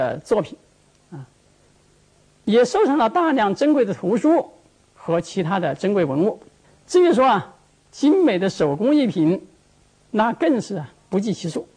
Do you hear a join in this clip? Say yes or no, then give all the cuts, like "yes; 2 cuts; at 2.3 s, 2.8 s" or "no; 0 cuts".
yes; 1 cut; at 6.6 s